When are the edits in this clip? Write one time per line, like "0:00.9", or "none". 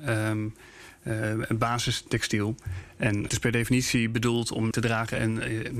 0:03.3
0:04.7